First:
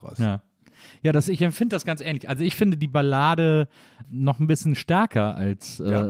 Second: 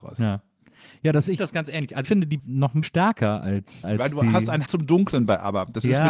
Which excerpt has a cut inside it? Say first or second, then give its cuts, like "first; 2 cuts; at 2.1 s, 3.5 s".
second; 6 cuts; at 1.4 s, 2.0 s, 2.4 s, 2.8 s, 3.8 s, 4.7 s